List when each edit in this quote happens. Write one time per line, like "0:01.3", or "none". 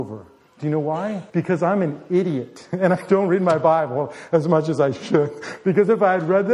0:01.3